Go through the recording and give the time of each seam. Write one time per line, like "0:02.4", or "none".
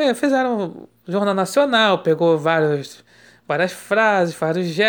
none